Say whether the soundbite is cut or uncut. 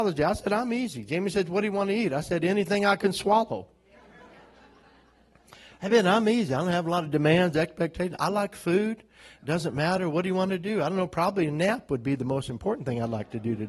uncut